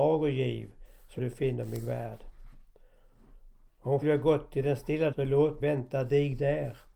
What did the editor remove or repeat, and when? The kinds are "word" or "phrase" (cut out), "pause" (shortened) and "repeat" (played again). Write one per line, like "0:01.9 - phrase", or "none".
0:01.2 - word
0:04.0 - word
0:05.1 - word
0:05.6 - word